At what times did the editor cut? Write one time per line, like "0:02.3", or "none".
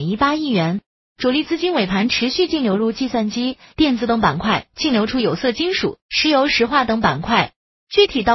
0:03.7
0:06.0